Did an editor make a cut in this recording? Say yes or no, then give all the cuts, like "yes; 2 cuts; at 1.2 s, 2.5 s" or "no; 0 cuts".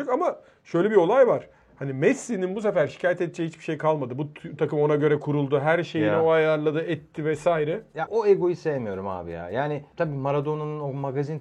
yes; 2 cuts; at 4.6 s, 8.1 s